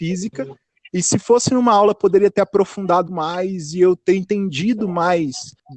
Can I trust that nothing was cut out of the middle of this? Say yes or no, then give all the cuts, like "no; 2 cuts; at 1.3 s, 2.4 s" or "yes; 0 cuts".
no; 1 cut; at 3.1 s